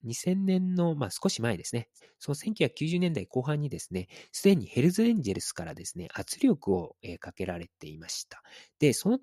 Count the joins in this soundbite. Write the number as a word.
one